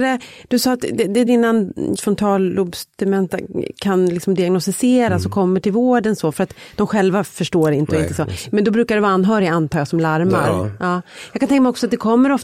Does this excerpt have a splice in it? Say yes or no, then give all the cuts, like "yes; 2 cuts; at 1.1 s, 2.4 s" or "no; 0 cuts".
yes; 2 cuts; at 1.3 s, 2.0 s